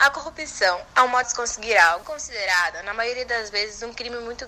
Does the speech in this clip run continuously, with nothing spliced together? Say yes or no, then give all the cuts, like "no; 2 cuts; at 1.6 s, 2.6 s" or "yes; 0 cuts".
no; 2 cuts; at 1.2 s, 2.0 s